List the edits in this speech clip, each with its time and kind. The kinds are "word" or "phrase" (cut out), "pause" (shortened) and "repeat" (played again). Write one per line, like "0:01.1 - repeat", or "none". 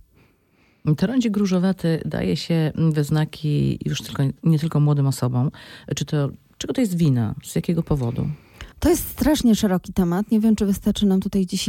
0:08.7 - pause